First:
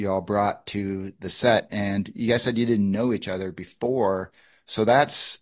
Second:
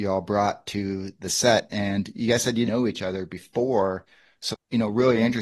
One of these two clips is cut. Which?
second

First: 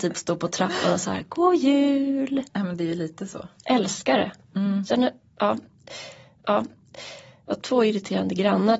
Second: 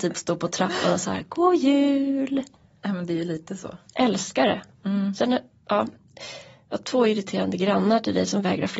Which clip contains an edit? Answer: first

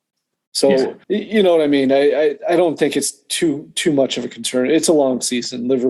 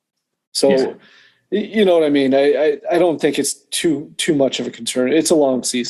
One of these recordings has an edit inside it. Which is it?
first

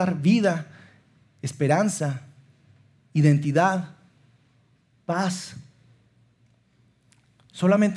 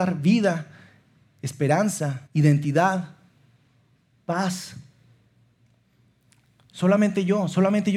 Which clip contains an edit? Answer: second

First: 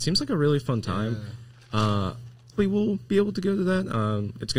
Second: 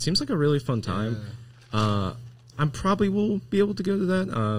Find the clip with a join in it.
first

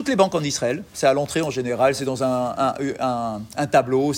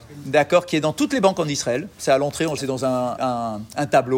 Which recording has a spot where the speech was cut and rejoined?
second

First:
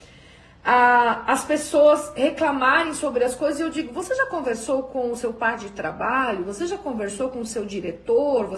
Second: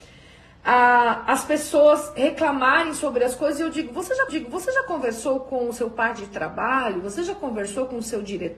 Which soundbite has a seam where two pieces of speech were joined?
second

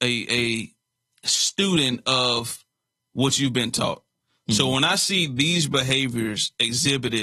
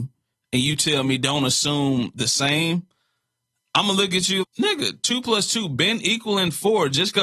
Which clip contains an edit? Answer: second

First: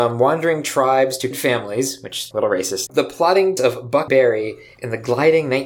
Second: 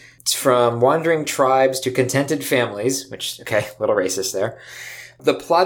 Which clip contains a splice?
first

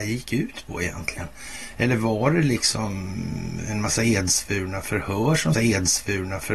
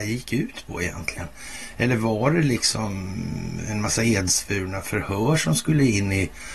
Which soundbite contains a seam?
first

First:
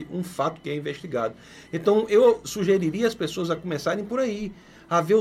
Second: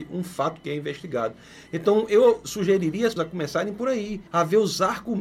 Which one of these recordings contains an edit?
second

